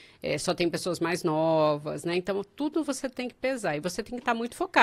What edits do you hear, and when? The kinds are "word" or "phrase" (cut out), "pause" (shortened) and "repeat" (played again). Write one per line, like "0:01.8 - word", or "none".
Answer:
none